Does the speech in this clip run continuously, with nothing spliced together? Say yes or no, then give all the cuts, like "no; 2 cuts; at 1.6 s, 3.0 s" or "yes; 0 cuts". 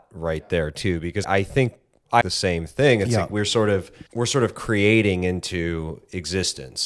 no; 3 cuts; at 1.2 s, 2.2 s, 4.1 s